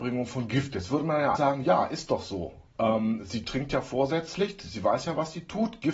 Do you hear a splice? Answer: yes; 1 cut; at 1.4 s

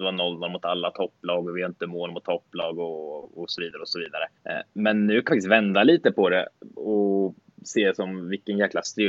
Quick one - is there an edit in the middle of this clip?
yes; 3 cuts; at 4.4 s, 5.3 s, 6.7 s

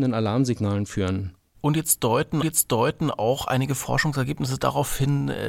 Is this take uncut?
no; 1 cut; at 2.4 s

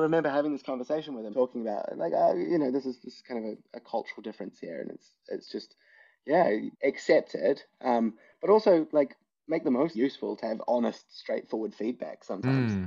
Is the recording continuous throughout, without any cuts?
no; 3 cuts; at 1.3 s, 6.7 s, 9.9 s

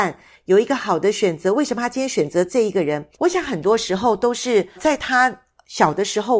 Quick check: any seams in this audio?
yes; 2 cuts; at 3.1 s, 4.8 s

